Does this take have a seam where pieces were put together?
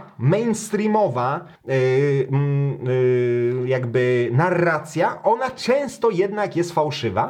yes; 1 cut; at 1.6 s

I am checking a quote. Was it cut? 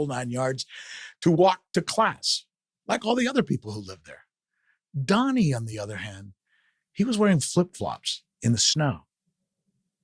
no; 0 cuts

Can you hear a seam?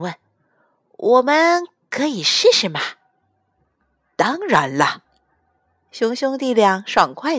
no; 0 cuts

